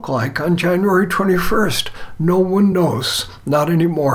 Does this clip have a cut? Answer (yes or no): no